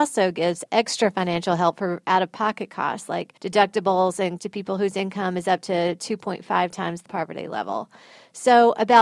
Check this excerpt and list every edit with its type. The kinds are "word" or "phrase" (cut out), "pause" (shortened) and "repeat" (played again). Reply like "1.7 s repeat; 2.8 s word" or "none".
3.4 s pause; 4.4 s word; 7.1 s word